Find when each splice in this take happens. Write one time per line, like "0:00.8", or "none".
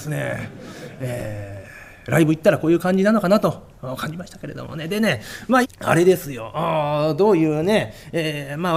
0:05.6